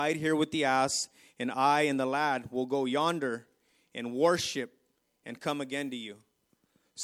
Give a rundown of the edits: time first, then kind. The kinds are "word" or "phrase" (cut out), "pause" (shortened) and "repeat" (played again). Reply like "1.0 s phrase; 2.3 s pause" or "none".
none

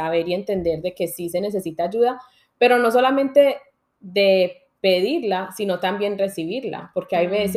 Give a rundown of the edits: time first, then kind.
none

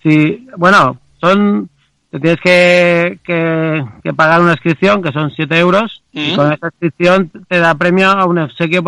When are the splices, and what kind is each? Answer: 6.0 s pause

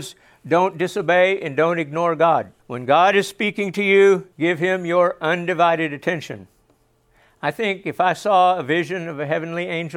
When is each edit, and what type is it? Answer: 2.6 s pause; 4.3 s pause

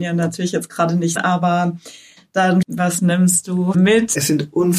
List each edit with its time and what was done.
1.2 s word; 2.6 s word; 3.7 s phrase

